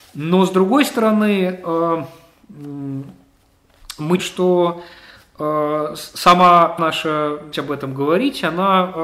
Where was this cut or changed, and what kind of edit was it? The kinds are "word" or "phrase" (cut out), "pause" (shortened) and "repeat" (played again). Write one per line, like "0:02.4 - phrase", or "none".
0:04.2 - word
0:06.8 - word
0:07.5 - word